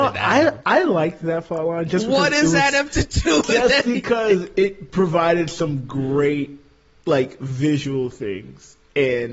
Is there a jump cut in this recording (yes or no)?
no